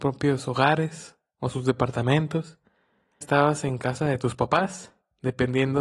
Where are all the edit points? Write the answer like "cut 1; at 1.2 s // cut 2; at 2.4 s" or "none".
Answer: cut 1; at 3.2 s